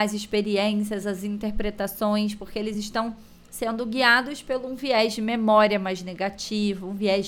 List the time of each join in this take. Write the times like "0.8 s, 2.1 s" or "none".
none